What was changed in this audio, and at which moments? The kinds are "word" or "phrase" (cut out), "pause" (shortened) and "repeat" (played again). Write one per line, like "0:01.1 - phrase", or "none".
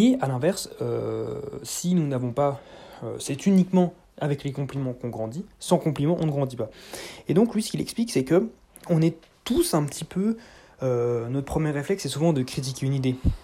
none